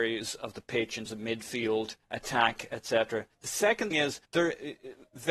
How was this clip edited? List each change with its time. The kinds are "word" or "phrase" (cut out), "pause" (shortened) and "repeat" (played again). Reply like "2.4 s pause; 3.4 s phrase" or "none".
1.1 s word; 2.0 s pause; 3.3 s pause; 3.9 s word; 4.2 s pause